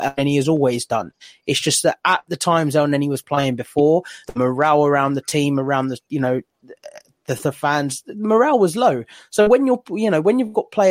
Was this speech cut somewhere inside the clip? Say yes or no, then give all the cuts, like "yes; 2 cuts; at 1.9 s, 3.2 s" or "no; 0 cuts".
yes; 1 cut; at 4.2 s